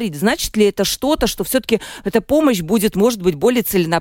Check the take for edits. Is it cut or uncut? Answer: uncut